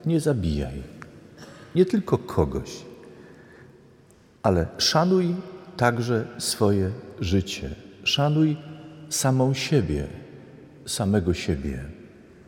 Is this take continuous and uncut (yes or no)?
yes